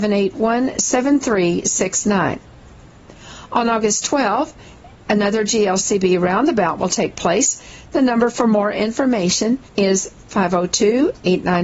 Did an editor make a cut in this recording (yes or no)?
yes